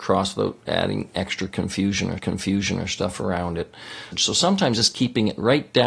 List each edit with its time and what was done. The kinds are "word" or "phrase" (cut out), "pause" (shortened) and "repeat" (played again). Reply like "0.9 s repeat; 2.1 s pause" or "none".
2.2 s repeat